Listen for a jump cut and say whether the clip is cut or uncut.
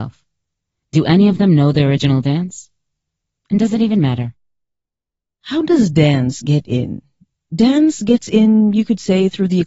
uncut